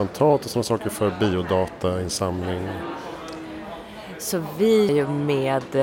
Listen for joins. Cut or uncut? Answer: cut